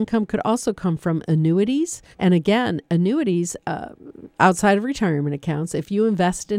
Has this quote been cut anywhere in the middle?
yes; 1 cut; at 2.1 s

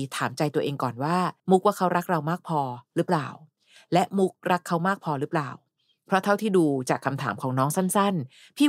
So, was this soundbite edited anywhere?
yes; 1 cut; at 1.4 s

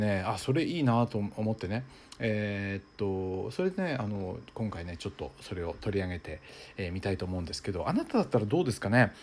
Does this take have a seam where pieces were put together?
no; 0 cuts

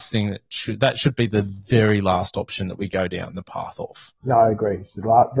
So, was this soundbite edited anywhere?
yes; 1 cut; at 4.2 s

